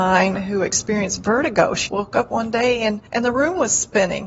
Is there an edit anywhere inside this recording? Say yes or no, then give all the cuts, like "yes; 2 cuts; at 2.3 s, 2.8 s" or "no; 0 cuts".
yes; 2 cuts; at 1.9 s, 3.1 s